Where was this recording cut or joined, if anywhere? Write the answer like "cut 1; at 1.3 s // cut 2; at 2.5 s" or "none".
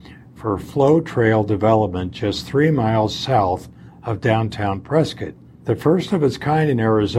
none